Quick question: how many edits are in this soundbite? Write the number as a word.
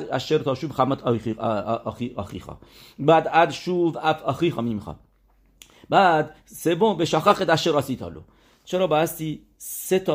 zero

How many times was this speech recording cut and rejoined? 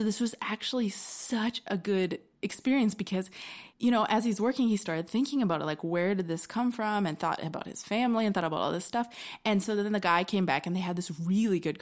one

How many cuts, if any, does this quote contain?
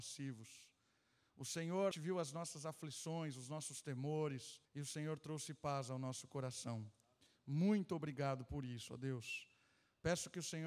two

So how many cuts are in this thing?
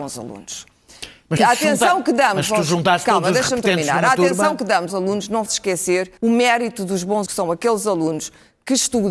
five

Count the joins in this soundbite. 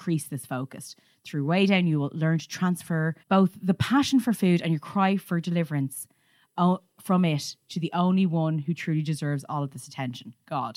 one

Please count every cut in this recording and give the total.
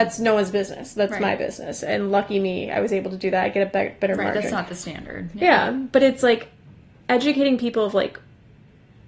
zero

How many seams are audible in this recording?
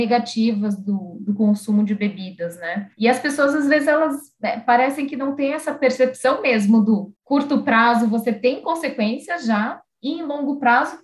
two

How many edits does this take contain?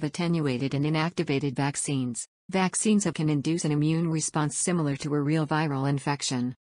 two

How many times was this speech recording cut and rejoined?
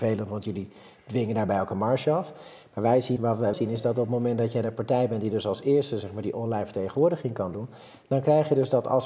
two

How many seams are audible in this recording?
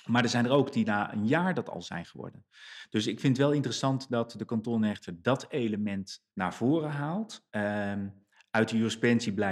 two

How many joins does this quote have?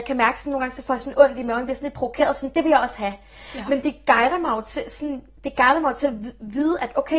zero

